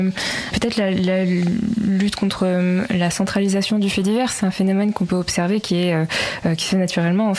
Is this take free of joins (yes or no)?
yes